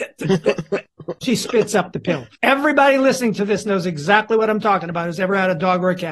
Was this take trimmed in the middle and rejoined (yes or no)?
yes